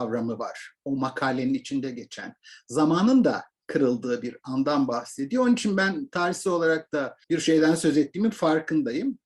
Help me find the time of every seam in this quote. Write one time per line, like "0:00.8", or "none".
0:07.2